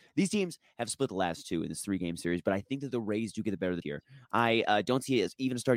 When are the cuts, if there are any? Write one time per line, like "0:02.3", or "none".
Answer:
0:03.8